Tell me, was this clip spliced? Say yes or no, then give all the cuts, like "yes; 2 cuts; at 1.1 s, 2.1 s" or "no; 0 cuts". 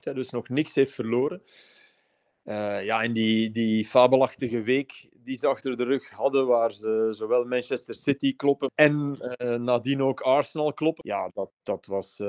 no; 0 cuts